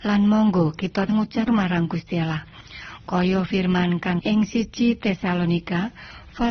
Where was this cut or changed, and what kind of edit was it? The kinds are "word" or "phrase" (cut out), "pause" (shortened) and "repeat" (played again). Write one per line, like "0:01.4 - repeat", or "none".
0:01.1 - word
0:01.5 - word
0:04.2 - word